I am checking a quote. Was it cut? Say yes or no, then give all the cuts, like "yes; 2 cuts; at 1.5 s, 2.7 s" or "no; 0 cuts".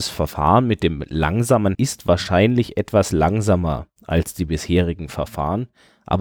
yes; 1 cut; at 1.7 s